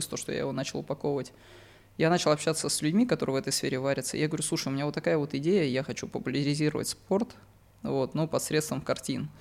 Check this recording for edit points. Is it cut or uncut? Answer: uncut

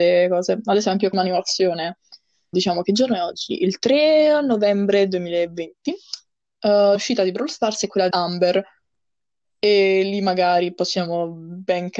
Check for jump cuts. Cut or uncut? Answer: cut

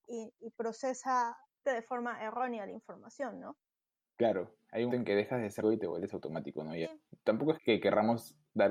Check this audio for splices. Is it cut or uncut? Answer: cut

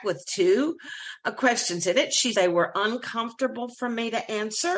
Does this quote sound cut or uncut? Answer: cut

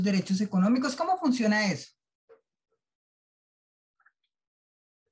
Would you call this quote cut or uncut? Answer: uncut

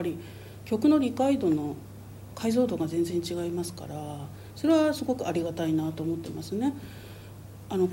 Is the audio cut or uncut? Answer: uncut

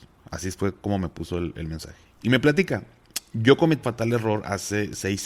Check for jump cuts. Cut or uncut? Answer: cut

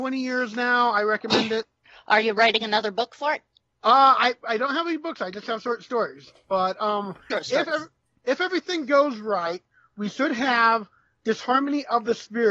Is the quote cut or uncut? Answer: cut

